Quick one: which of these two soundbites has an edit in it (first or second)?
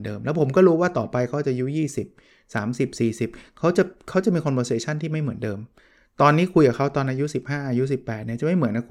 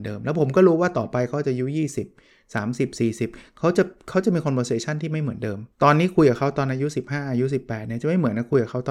second